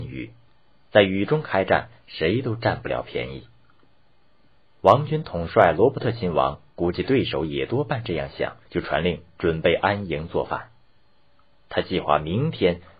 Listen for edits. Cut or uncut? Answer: cut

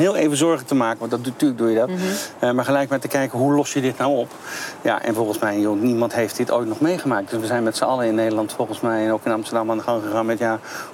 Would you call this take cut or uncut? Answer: uncut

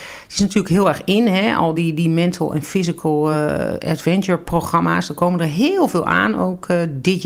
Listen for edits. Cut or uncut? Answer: uncut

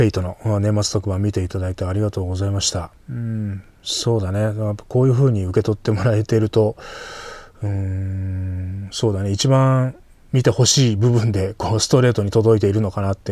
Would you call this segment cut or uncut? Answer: cut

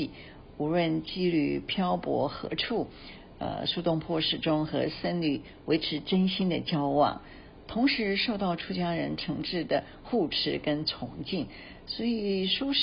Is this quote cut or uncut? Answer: uncut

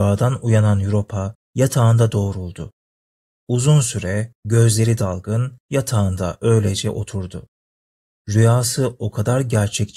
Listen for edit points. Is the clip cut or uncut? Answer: uncut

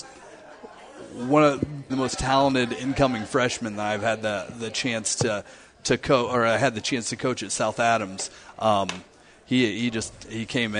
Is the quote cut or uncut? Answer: cut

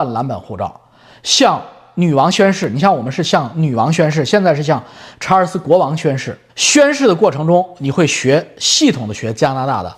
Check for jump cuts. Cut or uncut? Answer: cut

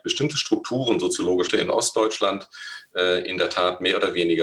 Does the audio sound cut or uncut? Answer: cut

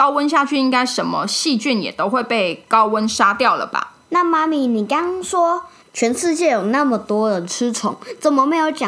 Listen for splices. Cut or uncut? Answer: cut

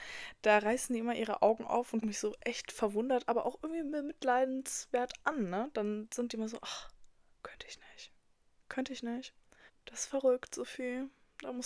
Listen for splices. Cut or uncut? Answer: cut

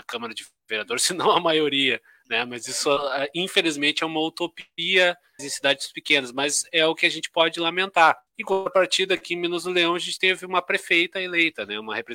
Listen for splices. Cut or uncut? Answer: cut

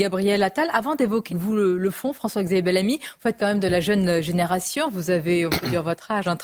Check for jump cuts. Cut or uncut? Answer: cut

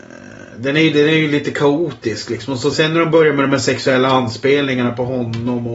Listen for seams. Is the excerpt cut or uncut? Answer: cut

